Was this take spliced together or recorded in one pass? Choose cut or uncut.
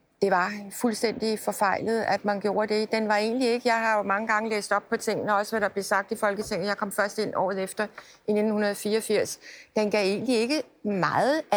uncut